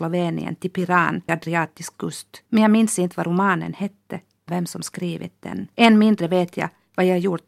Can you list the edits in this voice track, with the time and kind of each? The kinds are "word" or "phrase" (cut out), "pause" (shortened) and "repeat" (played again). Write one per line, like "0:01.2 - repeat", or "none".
0:01.3 - word
0:01.9 - word
0:02.5 - pause
0:04.5 - word
0:05.7 - pause